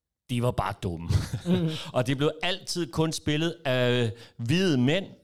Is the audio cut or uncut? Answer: uncut